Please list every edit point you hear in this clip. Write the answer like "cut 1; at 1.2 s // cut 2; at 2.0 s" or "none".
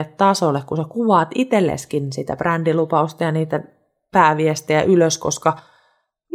none